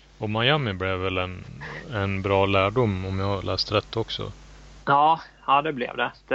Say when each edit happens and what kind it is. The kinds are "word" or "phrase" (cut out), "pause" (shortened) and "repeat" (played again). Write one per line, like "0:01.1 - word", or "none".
none

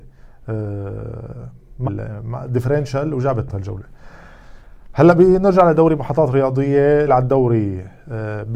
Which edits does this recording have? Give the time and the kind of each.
0:01.8 - word
0:03.5 - word
0:07.1 - word

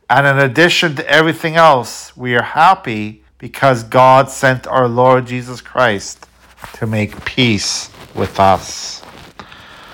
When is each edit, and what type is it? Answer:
0:03.3 - pause

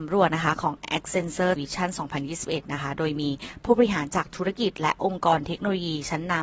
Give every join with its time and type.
0:01.6 - word

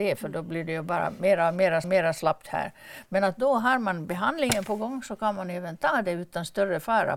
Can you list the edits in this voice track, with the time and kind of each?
0:01.8 - repeat

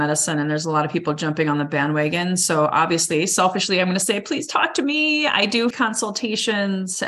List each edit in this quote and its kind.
0:05.7 - word

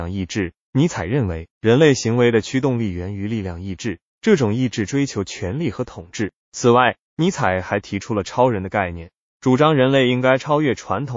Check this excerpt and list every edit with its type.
0:01.5 - pause
0:06.4 - pause

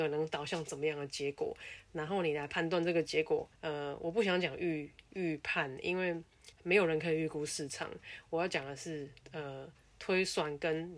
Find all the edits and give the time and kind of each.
0:03.5 - pause
0:06.5 - pause
0:09.2 - pause

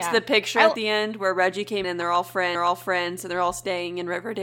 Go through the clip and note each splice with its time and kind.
0:01.8 - word
0:02.5 - repeat

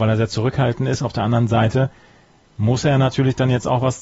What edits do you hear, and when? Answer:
none

